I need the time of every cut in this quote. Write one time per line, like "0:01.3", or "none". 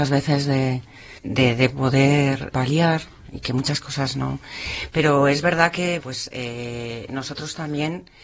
0:01.2
0:02.5
0:06.0

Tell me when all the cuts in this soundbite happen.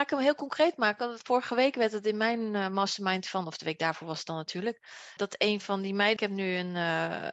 0:05.2
0:06.2

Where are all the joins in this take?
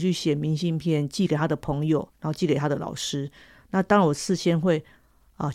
0:02.1

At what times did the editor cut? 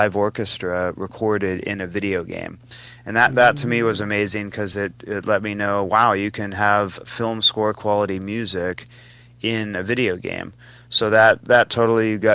none

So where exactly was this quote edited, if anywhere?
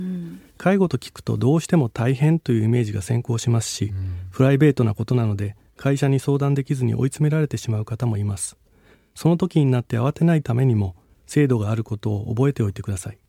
none

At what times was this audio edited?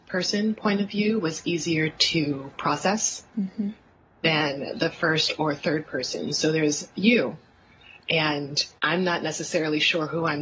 0:03.3
0:08.8

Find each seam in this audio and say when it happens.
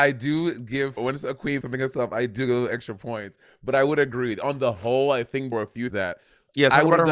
0:01.0
0:01.6
0:05.5
0:05.9

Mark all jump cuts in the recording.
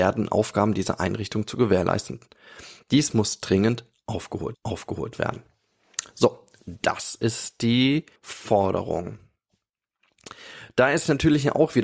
0:04.5
0:08.2

